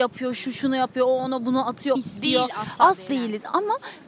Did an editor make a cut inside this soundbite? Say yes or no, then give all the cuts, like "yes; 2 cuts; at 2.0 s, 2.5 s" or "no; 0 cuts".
yes; 2 cuts; at 2.0 s, 3.1 s